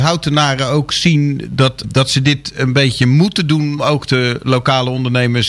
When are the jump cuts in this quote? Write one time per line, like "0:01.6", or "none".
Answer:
0:01.8
0:03.8